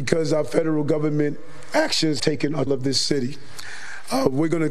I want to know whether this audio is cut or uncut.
cut